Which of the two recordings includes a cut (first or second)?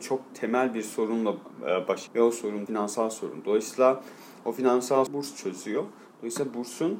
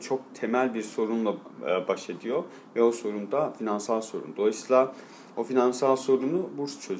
first